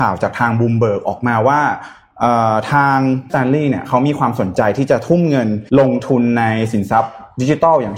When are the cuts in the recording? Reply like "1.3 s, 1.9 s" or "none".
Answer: 3.3 s, 5.7 s